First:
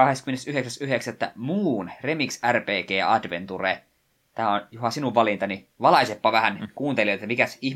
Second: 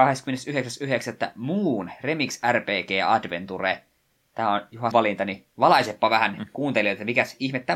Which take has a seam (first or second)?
second